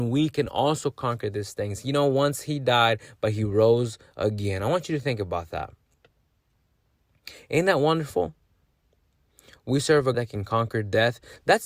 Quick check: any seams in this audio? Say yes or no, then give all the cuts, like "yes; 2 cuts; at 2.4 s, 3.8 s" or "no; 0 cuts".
yes; 1 cut; at 10.1 s